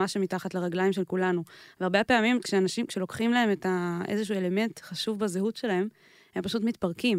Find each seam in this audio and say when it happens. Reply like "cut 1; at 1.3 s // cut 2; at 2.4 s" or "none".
none